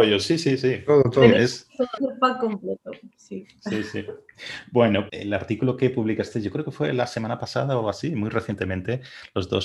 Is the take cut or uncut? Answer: cut